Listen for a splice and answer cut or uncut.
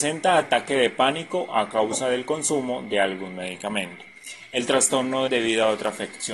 cut